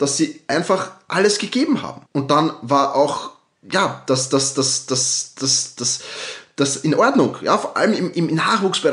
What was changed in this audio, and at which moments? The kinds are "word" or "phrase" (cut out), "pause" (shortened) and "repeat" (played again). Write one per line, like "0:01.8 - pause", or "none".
0:02.1 - pause

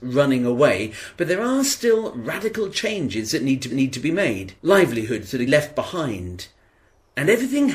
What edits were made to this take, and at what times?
0:03.7 - repeat
0:04.6 - pause
0:05.5 - phrase

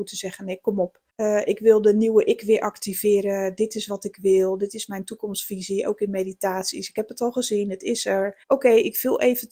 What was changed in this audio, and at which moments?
0:01.1 - pause
0:08.4 - pause

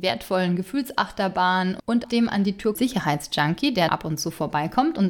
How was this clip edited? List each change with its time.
0:02.0 - word
0:02.7 - word
0:03.9 - word

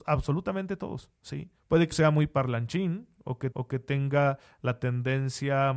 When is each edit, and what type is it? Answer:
0:01.6 - pause
0:01.9 - word
0:03.5 - repeat

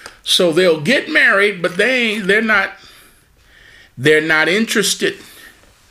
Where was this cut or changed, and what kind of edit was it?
none

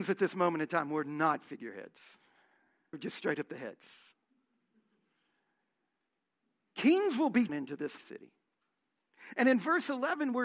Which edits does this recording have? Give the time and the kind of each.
0:02.9 - word
0:07.5 - word
0:08.0 - word

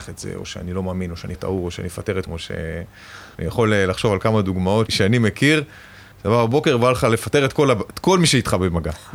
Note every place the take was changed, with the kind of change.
0:01.3 - word
0:02.3 - word
0:03.3 - pause
0:04.9 - word
0:06.1 - pause

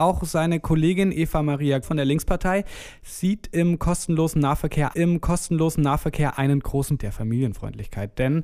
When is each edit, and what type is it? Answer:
0:01.8 - word
0:04.9 - repeat
0:07.0 - phrase

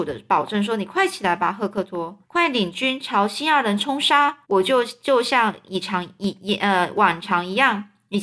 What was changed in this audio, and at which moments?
0:02.2 - pause
0:04.4 - pause

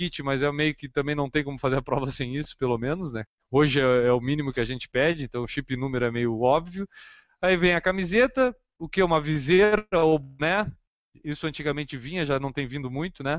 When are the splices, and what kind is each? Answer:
none

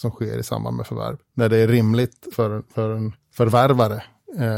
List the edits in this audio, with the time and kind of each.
0:01.2 - pause
0:02.3 - word
0:03.2 - pause

